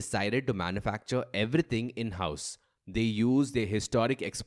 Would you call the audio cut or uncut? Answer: uncut